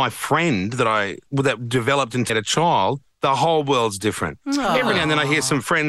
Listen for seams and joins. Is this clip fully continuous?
no; 1 cut; at 2.3 s

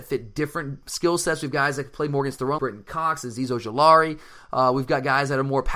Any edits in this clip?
yes; 1 cut; at 2.6 s

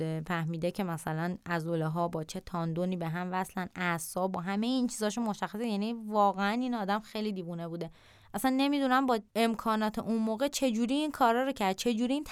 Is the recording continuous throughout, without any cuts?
yes; 0 cuts

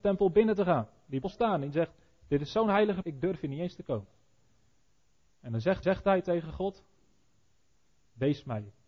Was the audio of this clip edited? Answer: yes; 3 cuts; at 1.2 s, 3.0 s, 5.8 s

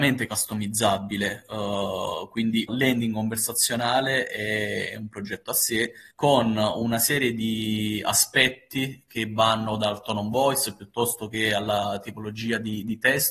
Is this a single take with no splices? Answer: no; 2 cuts; at 2.7 s, 6.1 s

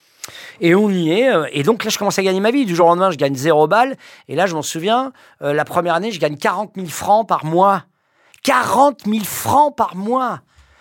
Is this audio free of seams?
yes; 0 cuts

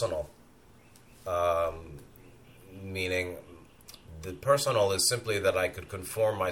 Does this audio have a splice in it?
no; 0 cuts

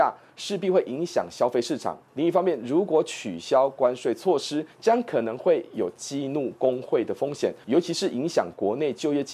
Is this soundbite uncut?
yes; 0 cuts

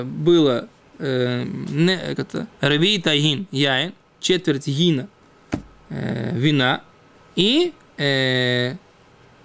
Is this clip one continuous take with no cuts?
no; 3 cuts; at 2.2 s, 2.5 s, 7.1 s

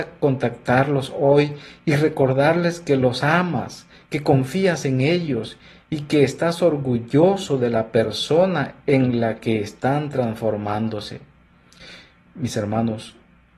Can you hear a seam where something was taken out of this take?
no; 0 cuts

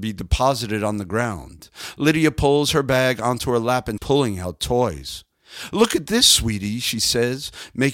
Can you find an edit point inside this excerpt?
yes; 1 cut; at 4.0 s

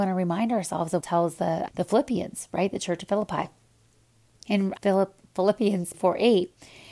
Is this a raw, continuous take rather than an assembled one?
no; 4 cuts; at 1.0 s, 1.7 s, 4.8 s, 5.9 s

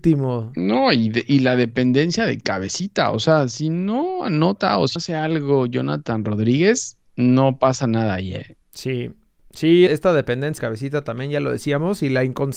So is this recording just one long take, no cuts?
no; 5 cuts; at 5.0 s, 7.1 s, 8.6 s, 9.9 s, 10.6 s

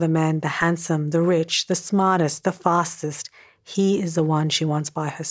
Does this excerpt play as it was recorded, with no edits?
yes; 0 cuts

